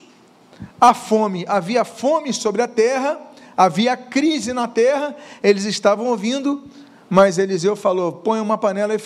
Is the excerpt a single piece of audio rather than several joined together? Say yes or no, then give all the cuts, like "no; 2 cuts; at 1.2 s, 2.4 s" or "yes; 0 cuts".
yes; 0 cuts